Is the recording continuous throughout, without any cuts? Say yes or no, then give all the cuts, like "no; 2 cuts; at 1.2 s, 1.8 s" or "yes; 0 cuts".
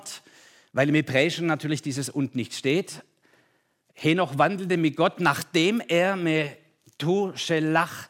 yes; 0 cuts